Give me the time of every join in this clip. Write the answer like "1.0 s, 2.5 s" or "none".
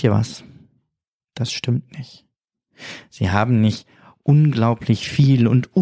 none

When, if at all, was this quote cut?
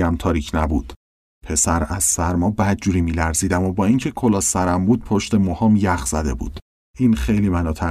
none

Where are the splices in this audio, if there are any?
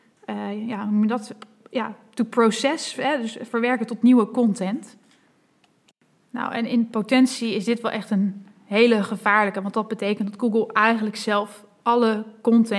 none

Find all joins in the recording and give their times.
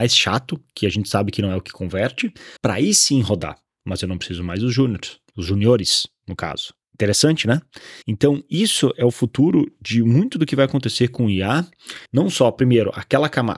2.6 s, 3.7 s, 5.3 s, 6.8 s, 8.0 s, 12.1 s

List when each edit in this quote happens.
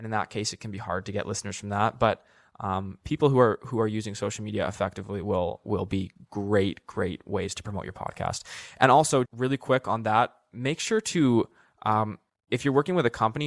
9.2 s

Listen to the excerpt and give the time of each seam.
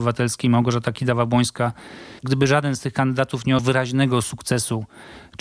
2.2 s, 3.6 s

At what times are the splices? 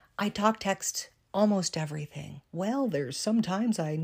2.4 s

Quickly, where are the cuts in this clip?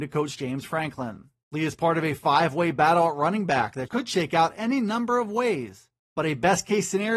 1.4 s, 6.0 s

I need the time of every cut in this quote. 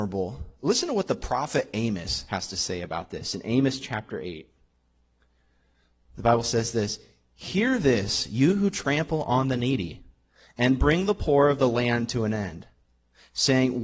none

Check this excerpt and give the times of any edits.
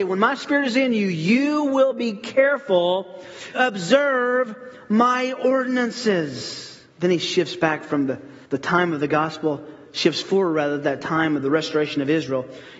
3.5 s, 6.9 s, 8.5 s

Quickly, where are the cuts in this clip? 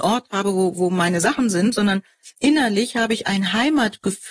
none

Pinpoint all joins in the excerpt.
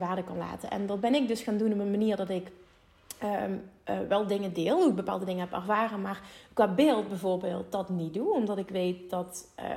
none

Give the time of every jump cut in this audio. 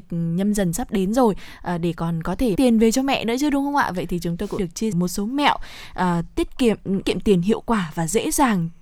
2.6 s, 4.6 s, 4.9 s, 7.0 s

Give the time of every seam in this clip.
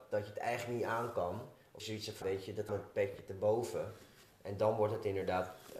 1.8 s, 2.2 s, 2.7 s

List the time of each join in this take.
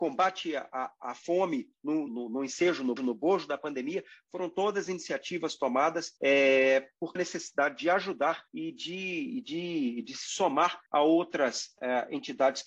2.1 s, 3.0 s, 6.2 s, 7.2 s, 8.5 s, 10.9 s

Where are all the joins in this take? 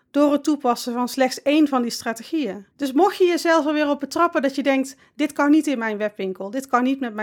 2.7 s

